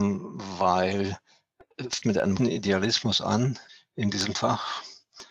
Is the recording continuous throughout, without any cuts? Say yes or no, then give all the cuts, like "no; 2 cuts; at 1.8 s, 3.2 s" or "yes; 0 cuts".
no; 3 cuts; at 2.0 s, 2.4 s, 3.7 s